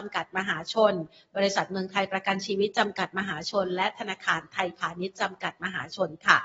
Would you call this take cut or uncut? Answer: uncut